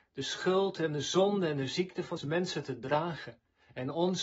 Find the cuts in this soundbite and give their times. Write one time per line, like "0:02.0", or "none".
0:02.2